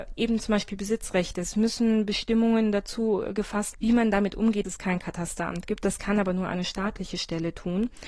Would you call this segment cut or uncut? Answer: cut